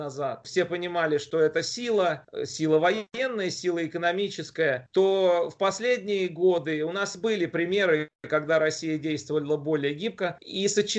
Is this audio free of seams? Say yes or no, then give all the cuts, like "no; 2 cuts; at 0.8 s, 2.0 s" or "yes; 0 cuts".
yes; 0 cuts